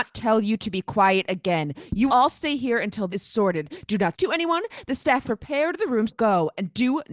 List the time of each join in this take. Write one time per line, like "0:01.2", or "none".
0:02.1
0:03.1
0:04.1
0:05.2
0:06.1